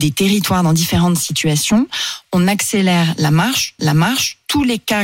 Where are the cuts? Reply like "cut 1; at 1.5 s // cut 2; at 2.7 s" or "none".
cut 1; at 3.8 s